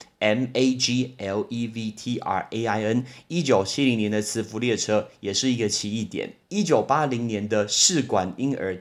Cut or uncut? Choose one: cut